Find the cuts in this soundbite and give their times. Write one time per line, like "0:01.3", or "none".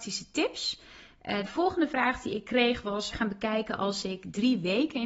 0:01.5
0:03.1